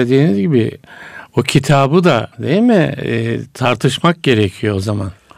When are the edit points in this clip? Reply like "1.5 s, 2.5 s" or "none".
2.3 s